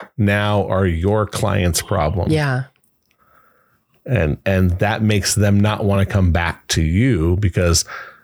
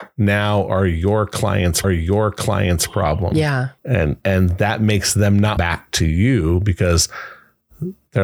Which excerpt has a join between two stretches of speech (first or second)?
second